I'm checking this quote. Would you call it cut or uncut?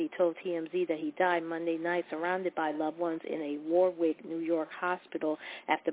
uncut